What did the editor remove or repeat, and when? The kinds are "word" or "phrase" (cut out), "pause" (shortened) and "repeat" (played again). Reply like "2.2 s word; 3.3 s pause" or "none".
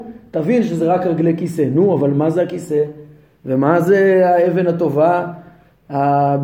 none